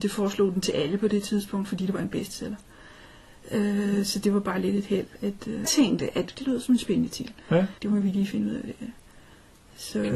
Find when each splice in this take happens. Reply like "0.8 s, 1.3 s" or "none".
5.1 s, 5.6 s, 6.3 s, 7.8 s